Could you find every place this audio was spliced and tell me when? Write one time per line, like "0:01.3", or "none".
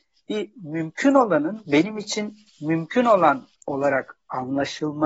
0:02.5
0:03.5